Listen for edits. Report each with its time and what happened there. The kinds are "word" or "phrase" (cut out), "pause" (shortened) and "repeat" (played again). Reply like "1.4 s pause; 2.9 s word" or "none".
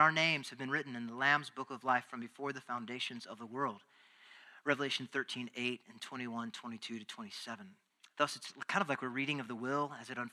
7.9 s pause